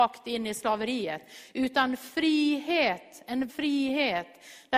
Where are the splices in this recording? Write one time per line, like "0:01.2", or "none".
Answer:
0:03.5